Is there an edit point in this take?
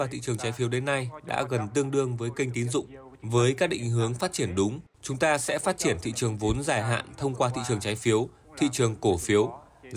no; 0 cuts

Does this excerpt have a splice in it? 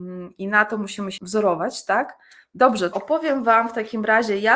yes; 2 cuts; at 1.2 s, 2.9 s

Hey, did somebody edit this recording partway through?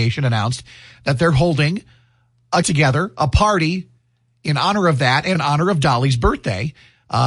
yes; 2 cuts; at 2.6 s, 5.3 s

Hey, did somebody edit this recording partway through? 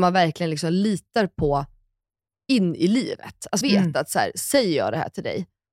yes; 1 cut; at 3.6 s

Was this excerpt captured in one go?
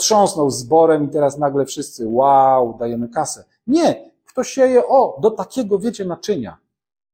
yes; 0 cuts

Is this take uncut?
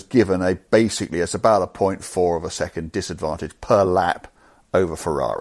yes; 0 cuts

